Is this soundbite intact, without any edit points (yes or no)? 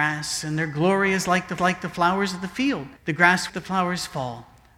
no